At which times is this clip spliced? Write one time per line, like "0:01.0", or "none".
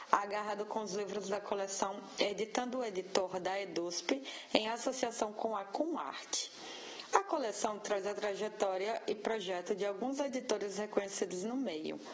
none